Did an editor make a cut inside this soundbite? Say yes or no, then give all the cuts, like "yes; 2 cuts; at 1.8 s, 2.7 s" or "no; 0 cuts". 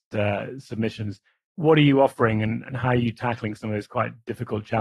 no; 0 cuts